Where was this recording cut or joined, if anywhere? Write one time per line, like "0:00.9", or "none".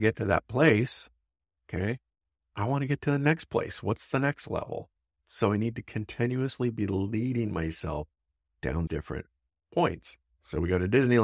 0:08.9